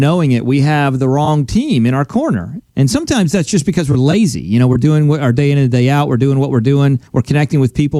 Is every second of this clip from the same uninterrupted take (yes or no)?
no